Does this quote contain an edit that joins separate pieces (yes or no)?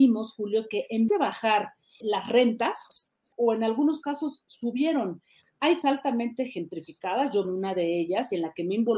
yes